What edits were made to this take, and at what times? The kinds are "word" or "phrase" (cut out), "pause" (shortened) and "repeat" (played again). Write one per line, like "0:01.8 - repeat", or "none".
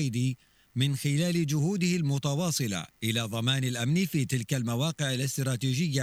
0:02.9 - pause